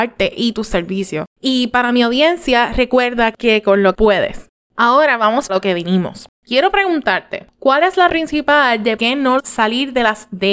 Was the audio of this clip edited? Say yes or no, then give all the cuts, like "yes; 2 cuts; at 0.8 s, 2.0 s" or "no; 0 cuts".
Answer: yes; 7 cuts; at 1.3 s, 3.9 s, 4.7 s, 5.5 s, 8.1 s, 9.0 s, 9.4 s